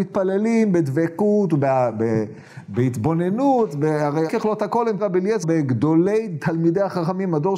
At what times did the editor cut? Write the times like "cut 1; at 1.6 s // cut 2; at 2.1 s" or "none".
cut 1; at 4.3 s // cut 2; at 5.0 s // cut 3; at 5.4 s